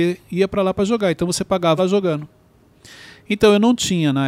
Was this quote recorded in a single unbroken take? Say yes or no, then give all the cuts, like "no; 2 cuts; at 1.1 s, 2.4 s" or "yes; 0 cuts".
no; 1 cut; at 1.8 s